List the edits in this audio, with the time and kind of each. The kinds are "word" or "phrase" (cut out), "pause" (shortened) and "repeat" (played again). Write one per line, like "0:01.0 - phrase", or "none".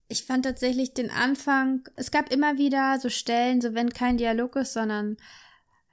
0:03.9 - word